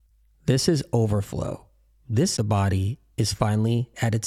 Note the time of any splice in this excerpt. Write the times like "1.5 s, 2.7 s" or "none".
2.4 s